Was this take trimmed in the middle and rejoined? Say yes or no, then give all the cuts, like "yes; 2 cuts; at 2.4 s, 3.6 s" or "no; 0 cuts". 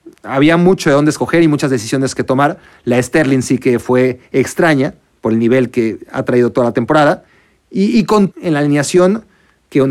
yes; 1 cut; at 8.3 s